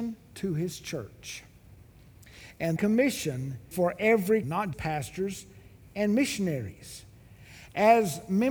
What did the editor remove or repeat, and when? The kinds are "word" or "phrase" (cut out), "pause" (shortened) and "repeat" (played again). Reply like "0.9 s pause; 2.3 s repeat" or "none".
2.8 s word; 3.7 s word; 4.4 s word; 4.7 s word